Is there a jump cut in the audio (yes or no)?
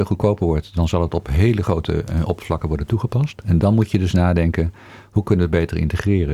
no